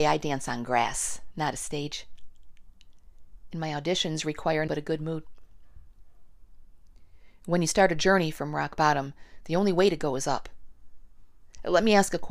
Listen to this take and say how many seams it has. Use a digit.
1